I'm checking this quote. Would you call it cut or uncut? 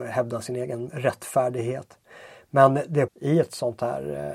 cut